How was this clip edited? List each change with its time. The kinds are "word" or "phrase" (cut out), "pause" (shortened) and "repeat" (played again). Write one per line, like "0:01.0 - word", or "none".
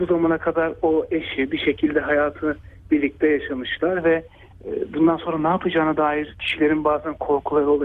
none